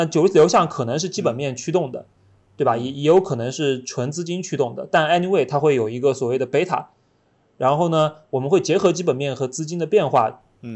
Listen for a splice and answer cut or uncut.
uncut